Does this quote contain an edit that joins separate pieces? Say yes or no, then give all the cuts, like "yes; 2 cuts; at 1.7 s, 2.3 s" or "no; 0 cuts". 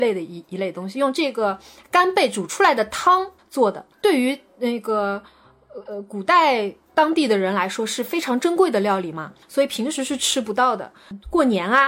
yes; 2 cuts; at 3.4 s, 9.4 s